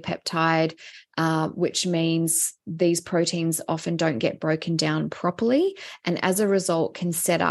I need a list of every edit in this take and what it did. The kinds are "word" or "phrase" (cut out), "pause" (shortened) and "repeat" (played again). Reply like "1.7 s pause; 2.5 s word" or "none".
none